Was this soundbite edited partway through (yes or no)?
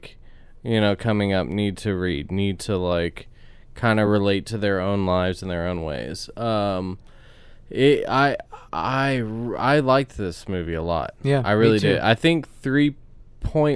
no